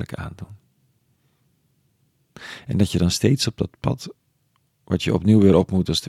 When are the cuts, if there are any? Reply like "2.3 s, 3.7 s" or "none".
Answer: none